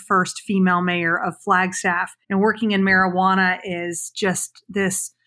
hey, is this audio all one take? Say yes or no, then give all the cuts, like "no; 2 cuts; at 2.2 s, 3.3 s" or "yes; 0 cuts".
no; 1 cut; at 2.2 s